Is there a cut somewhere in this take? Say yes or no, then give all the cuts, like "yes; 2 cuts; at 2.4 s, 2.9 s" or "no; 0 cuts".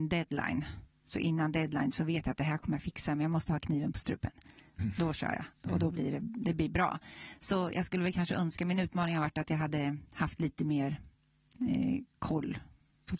no; 0 cuts